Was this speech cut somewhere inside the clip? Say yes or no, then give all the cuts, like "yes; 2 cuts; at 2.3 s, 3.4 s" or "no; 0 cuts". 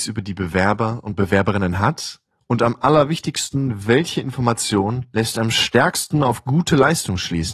no; 0 cuts